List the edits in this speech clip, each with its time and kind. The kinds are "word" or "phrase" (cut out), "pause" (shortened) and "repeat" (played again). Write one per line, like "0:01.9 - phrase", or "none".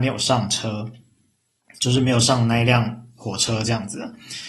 none